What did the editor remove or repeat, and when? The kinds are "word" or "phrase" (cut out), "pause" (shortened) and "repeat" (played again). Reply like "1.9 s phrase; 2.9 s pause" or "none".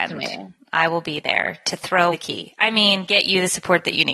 2.1 s word